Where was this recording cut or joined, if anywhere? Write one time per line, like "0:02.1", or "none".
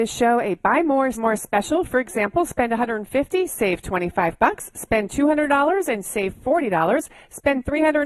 0:01.1